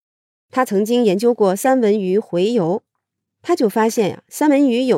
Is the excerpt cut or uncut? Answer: uncut